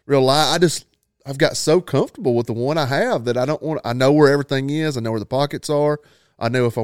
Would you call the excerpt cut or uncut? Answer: uncut